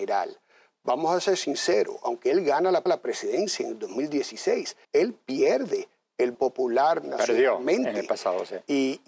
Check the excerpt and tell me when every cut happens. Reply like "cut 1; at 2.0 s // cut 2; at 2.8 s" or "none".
cut 1; at 2.9 s // cut 2; at 4.8 s // cut 3; at 6.3 s